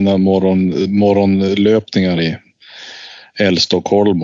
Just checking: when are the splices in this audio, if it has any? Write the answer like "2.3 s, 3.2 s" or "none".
2.2 s

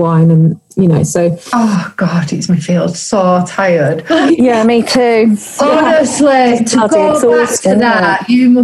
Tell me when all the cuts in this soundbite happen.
2.5 s

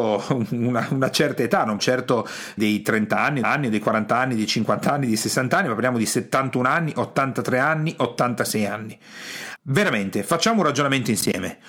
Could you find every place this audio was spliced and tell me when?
1.8 s, 2.6 s, 3.4 s, 9.6 s

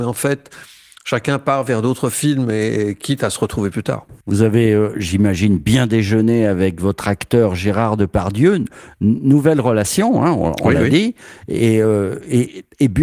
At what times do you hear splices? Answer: none

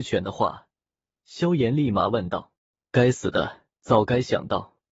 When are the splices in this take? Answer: 2.6 s, 3.7 s

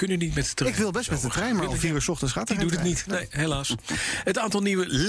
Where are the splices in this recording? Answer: none

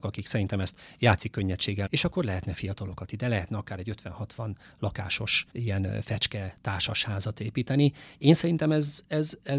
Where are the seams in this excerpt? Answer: 1.9 s, 5.5 s

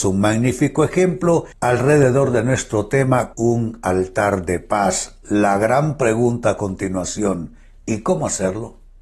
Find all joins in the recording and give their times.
1.5 s, 3.3 s

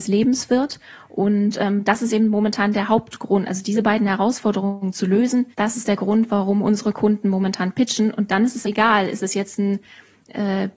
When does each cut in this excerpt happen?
5.5 s, 8.6 s

